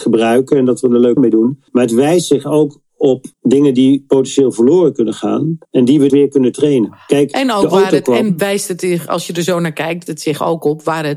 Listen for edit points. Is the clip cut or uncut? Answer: cut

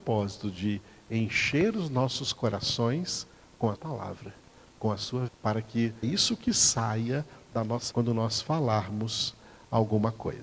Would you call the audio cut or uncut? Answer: cut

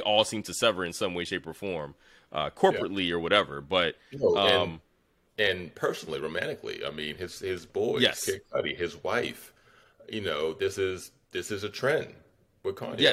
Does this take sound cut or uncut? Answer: uncut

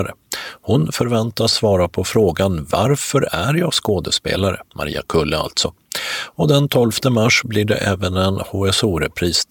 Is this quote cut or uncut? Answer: cut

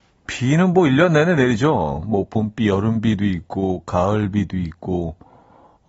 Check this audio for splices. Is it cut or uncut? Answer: uncut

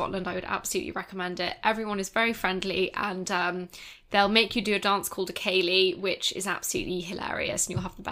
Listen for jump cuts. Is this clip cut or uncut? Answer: uncut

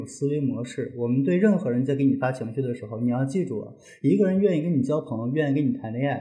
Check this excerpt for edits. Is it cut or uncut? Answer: uncut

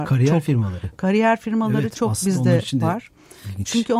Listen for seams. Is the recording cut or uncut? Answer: uncut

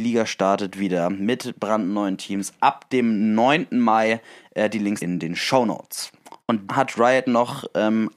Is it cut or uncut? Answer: cut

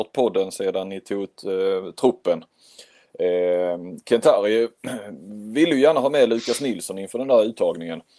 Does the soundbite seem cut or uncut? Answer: uncut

